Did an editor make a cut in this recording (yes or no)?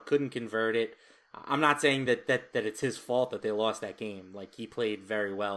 no